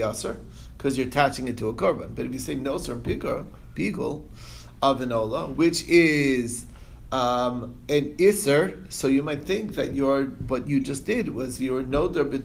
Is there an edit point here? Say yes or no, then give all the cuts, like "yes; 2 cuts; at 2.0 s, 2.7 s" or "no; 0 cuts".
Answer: no; 0 cuts